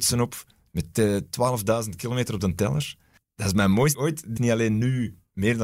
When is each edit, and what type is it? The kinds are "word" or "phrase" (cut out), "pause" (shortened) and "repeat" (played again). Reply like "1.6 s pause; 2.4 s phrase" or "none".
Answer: 3.9 s word; 4.4 s word